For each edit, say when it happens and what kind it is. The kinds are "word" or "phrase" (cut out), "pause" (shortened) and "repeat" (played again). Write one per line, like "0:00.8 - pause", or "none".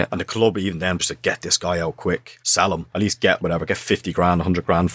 0:01.0 - phrase
0:02.4 - pause
0:02.9 - pause
0:03.4 - word